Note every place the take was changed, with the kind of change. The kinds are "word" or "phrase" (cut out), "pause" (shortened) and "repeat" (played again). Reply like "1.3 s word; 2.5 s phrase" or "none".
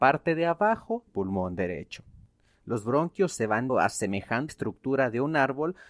1.1 s word; 3.7 s word; 4.5 s word